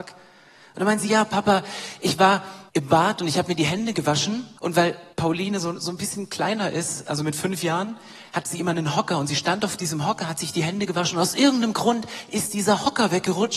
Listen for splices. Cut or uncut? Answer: cut